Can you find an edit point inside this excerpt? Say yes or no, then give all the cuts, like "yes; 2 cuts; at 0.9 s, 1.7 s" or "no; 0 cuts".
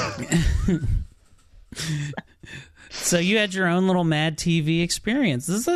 no; 0 cuts